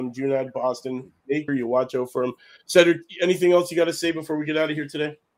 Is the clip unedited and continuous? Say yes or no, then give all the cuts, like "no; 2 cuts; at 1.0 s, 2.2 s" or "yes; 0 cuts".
no; 1 cut; at 1.5 s